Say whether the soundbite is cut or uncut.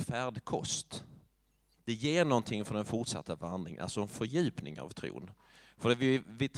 uncut